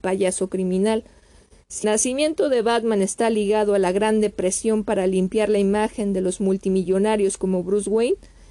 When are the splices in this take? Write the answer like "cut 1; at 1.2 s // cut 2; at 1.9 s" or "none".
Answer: cut 1; at 1.8 s